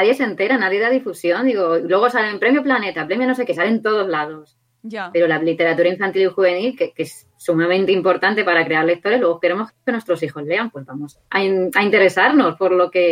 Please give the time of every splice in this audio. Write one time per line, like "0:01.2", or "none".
none